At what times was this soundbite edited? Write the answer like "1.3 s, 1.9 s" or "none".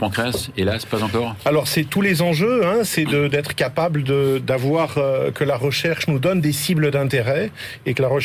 none